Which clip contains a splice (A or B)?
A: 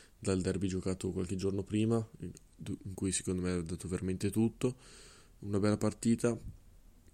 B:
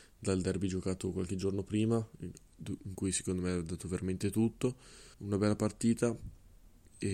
B